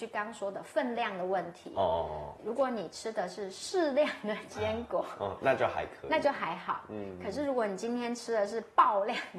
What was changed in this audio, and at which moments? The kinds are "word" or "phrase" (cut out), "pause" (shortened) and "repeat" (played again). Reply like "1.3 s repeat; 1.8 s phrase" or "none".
2.4 s word